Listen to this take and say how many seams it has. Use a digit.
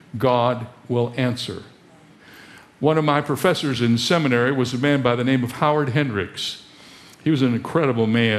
0